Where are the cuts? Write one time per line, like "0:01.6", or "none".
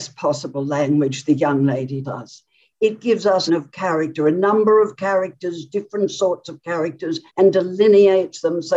0:02.0
0:03.5
0:07.3